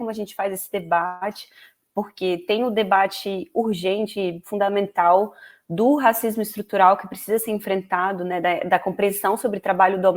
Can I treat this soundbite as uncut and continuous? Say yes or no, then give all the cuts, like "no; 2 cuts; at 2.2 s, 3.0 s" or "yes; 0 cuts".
yes; 0 cuts